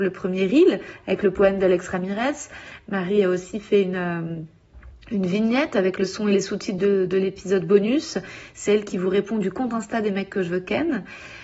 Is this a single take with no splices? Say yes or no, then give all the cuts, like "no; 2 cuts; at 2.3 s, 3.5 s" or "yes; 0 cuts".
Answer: yes; 0 cuts